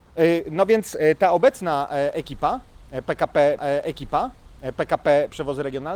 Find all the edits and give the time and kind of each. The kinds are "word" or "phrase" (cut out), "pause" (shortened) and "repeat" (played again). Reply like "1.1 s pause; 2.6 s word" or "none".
3.6 s repeat